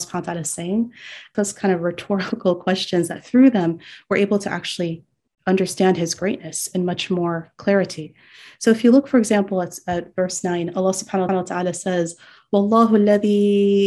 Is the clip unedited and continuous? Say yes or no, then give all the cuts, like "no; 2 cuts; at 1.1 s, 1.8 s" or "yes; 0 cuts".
no; 2 cuts; at 1.3 s, 11.3 s